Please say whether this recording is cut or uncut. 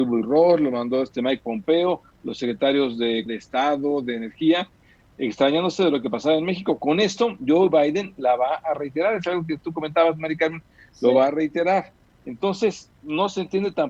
cut